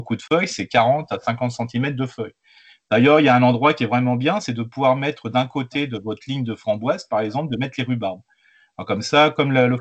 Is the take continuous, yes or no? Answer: yes